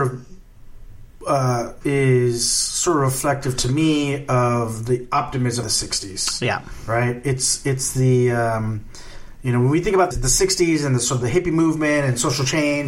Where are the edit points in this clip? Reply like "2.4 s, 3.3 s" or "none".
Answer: 1.8 s, 5.6 s, 10.1 s